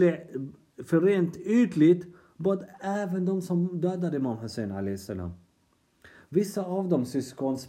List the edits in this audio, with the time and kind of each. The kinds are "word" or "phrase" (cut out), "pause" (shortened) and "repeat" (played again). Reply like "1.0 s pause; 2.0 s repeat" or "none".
none